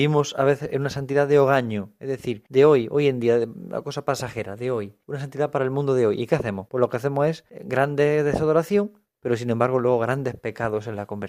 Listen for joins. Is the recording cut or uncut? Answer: uncut